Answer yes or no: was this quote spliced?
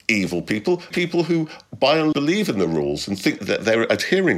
yes